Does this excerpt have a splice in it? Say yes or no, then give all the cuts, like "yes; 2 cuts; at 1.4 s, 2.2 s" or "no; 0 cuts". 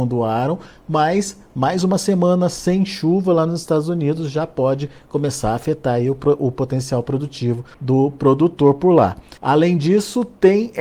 yes; 2 cuts; at 7.7 s, 9.4 s